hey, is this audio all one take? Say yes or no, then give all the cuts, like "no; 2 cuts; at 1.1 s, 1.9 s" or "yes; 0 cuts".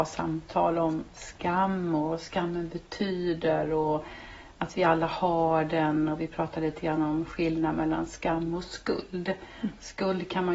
yes; 0 cuts